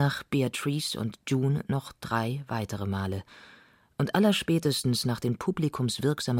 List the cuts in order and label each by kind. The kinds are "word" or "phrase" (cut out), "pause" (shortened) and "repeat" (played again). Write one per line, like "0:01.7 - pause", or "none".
none